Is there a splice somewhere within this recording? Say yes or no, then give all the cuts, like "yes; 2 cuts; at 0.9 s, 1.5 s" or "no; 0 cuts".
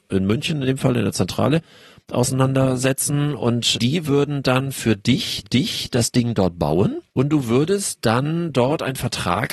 yes; 3 cuts; at 3.7 s, 5.4 s, 7.1 s